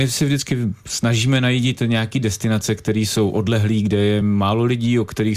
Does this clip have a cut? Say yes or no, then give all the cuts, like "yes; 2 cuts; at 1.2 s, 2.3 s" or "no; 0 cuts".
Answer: no; 0 cuts